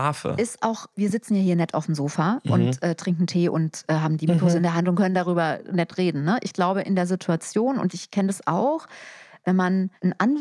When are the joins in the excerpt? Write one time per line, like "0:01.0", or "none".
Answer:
none